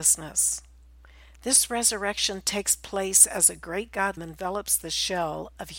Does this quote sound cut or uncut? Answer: cut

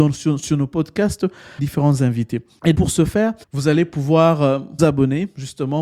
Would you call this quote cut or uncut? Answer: cut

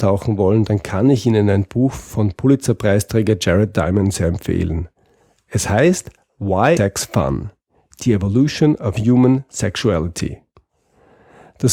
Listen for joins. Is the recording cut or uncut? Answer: cut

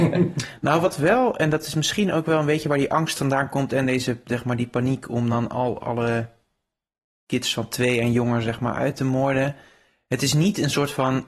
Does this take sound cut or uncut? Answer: uncut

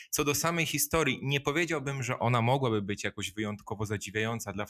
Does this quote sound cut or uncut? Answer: uncut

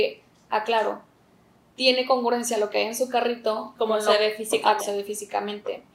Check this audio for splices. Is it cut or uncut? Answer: cut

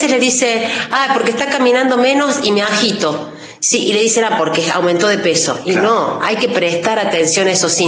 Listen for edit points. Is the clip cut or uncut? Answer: uncut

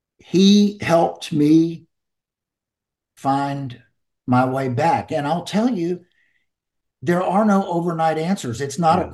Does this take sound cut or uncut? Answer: uncut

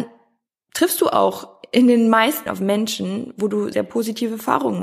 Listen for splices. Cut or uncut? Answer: cut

